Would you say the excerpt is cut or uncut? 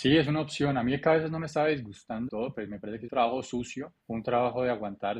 cut